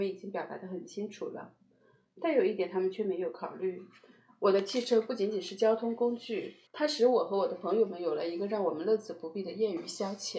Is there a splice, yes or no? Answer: yes